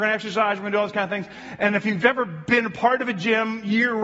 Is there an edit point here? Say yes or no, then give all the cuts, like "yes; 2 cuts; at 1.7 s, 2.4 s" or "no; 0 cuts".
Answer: no; 0 cuts